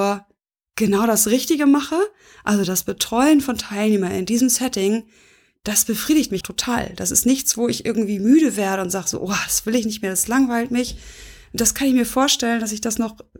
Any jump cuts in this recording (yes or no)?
yes